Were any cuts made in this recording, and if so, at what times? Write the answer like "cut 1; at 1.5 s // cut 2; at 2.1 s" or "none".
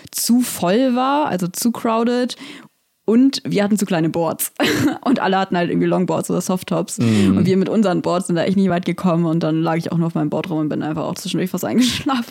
none